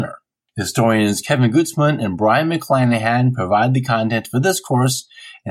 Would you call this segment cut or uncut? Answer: uncut